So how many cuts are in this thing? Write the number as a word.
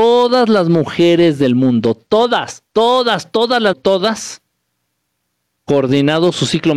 two